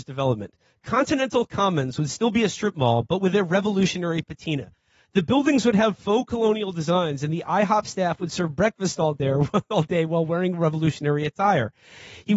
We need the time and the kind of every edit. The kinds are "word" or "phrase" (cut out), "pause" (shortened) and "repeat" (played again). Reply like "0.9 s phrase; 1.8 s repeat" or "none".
none